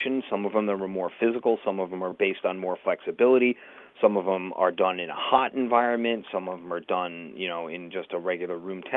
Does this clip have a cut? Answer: no; 0 cuts

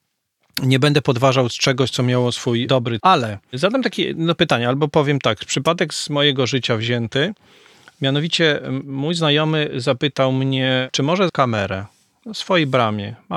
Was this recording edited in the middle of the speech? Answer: yes; 2 cuts; at 3.0 s, 11.3 s

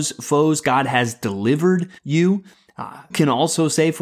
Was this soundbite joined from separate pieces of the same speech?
yes; 2 cuts; at 2.0 s, 3.1 s

